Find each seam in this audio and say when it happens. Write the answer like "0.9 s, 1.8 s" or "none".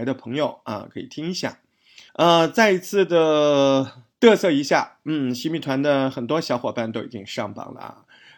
2.1 s, 4.1 s